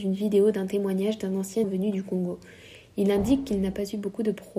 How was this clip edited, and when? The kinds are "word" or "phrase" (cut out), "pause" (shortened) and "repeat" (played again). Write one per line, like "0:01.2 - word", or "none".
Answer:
0:01.6 - word